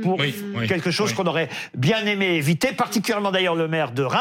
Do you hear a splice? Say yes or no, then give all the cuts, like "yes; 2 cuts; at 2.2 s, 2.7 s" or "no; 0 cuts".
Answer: no; 0 cuts